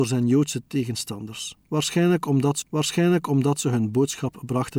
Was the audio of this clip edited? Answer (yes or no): yes